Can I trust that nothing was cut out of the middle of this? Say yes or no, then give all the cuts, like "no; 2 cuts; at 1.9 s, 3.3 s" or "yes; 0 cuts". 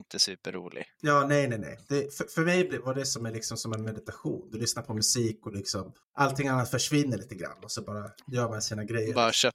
no; 1 cut; at 6.0 s